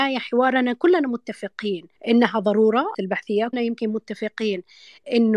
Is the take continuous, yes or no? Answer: no